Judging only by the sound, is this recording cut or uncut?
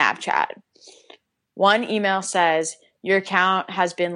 uncut